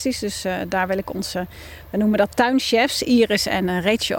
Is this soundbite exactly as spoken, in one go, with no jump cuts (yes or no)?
yes